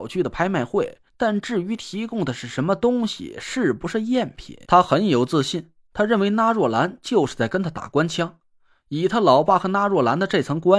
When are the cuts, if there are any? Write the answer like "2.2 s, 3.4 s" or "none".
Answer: 1.1 s, 4.6 s

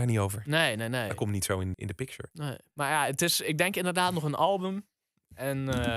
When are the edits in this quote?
1.7 s

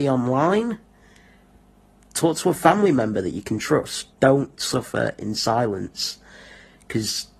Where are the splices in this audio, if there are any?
4.1 s

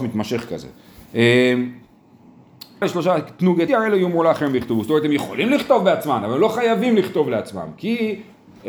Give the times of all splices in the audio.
2.8 s, 3.7 s

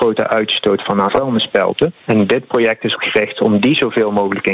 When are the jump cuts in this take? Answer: 1.1 s, 2.0 s, 2.9 s

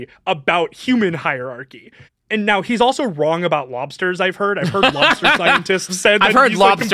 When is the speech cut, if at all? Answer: 2.1 s, 5.9 s

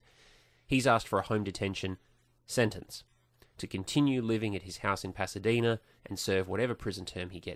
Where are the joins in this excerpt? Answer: none

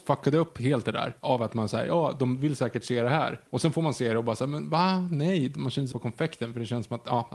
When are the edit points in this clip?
3.5 s, 5.9 s

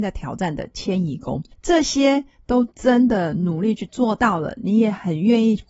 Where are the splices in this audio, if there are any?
1.5 s

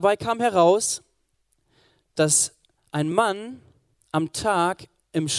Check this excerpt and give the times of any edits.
none

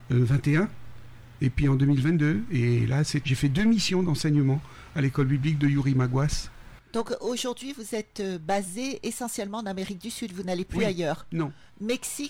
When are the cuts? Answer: 3.2 s

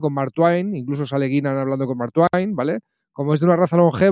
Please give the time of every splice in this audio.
none

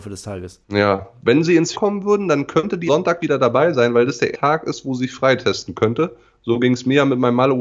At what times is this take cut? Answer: 1.7 s, 2.9 s, 3.2 s, 4.3 s

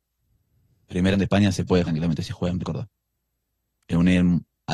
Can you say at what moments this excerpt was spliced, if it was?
1.1 s, 1.8 s, 2.6 s

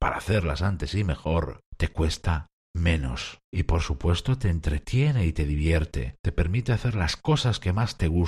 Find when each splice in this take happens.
1.7 s, 3.4 s, 6.2 s

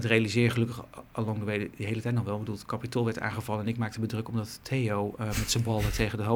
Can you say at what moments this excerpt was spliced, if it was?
none

